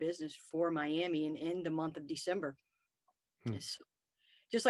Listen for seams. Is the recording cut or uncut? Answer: uncut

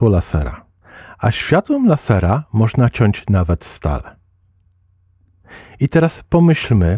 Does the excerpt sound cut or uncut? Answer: uncut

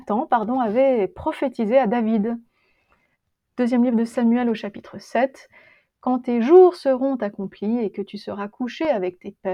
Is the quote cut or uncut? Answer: uncut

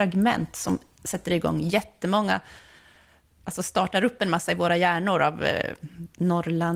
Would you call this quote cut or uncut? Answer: uncut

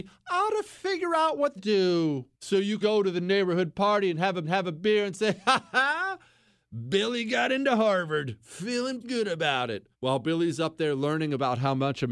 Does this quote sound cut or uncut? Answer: cut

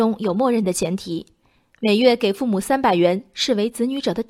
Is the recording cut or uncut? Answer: uncut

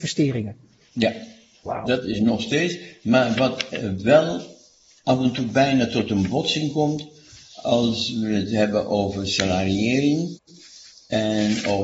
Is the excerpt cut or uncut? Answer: uncut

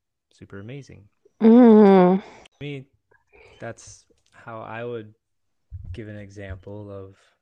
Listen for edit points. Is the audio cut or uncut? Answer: uncut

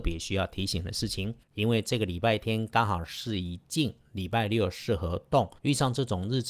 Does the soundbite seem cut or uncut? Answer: cut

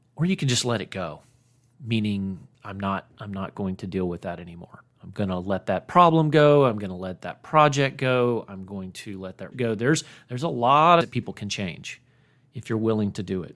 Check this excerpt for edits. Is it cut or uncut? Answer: cut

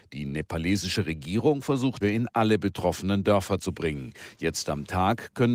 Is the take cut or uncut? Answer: cut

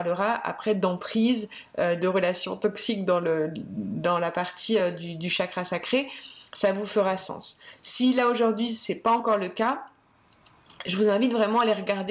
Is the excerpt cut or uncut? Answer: uncut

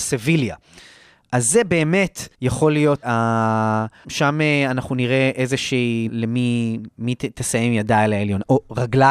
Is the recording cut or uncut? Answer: cut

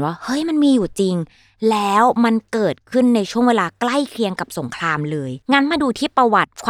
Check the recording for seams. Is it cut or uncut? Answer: cut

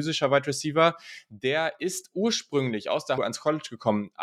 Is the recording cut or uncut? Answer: cut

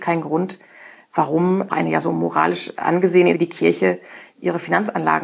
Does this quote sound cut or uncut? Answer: cut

